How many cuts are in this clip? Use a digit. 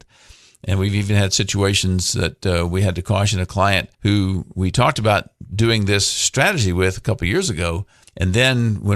2